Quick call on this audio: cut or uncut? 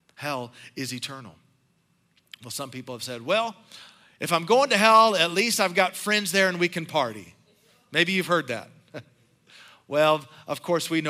uncut